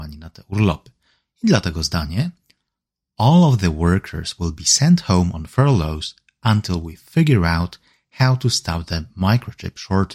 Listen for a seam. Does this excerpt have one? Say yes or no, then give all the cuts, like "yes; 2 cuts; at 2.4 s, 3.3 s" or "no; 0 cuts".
no; 0 cuts